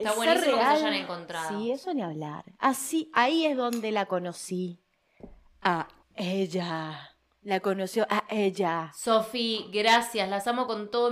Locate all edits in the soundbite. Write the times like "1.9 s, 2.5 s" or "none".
6.0 s

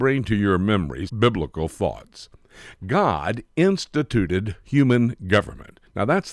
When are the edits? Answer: 1.1 s

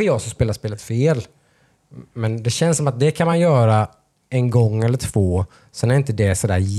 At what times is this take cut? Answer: none

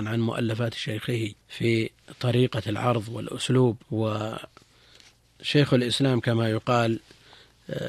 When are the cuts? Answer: 1.4 s, 3.8 s

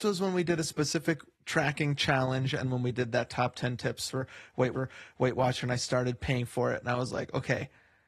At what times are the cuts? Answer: 1.3 s, 2.6 s, 4.7 s

